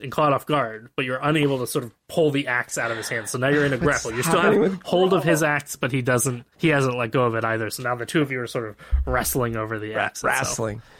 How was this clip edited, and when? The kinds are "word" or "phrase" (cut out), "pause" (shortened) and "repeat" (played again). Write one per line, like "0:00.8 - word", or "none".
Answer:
0:06.5 - pause